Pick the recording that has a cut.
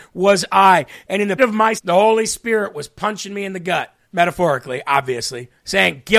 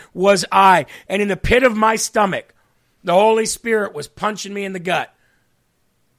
first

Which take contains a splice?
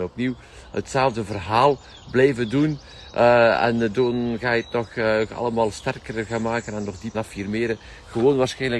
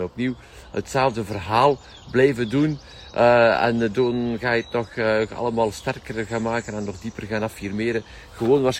first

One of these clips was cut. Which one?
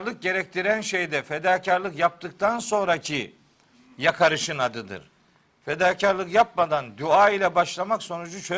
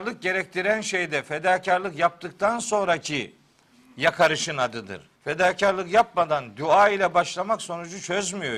second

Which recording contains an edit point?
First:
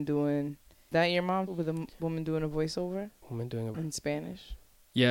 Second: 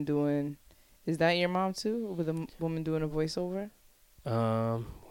first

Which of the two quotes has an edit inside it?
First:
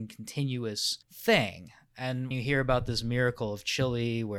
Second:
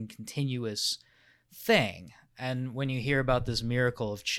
first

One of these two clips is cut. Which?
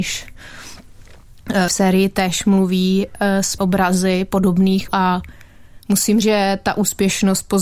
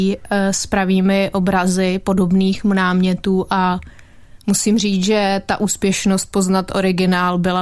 first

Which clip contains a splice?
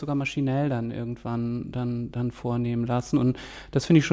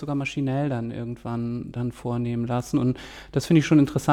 second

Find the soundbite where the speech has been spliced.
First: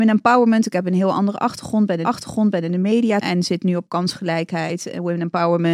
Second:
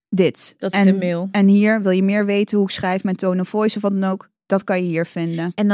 first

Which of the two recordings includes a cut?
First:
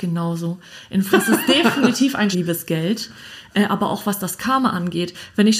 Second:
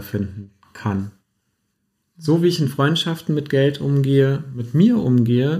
first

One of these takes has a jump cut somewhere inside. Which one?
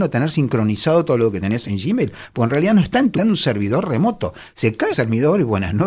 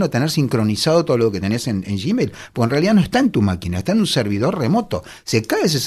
first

